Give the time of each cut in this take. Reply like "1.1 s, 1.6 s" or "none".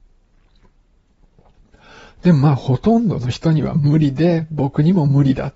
none